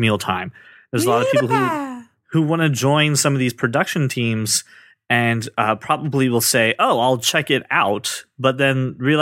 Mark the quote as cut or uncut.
uncut